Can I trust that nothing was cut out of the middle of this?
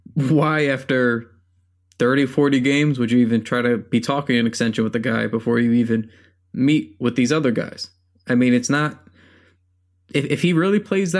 yes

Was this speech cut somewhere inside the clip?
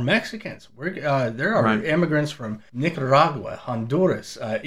no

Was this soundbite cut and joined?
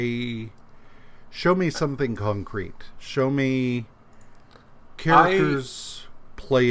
no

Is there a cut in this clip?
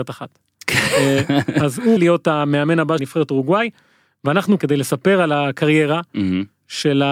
yes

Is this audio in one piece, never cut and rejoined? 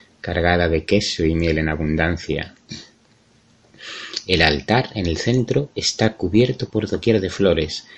yes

